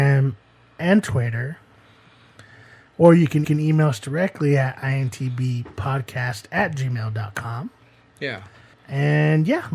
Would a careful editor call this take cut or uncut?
cut